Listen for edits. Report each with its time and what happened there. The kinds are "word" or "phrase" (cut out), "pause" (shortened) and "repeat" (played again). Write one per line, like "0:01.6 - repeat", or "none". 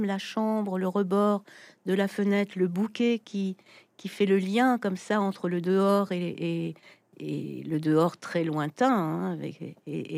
none